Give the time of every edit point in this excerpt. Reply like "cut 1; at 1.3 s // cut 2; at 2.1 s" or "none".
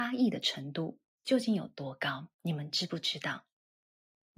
cut 1; at 2.3 s